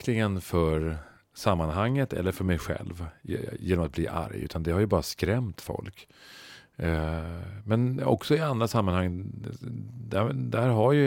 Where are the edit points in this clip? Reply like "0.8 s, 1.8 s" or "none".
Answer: none